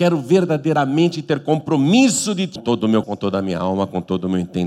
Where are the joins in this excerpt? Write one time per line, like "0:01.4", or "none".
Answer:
0:02.6
0:03.0